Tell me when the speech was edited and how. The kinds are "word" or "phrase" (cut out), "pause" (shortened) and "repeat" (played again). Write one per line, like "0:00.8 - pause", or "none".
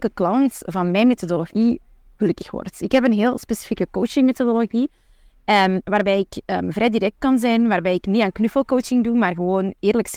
none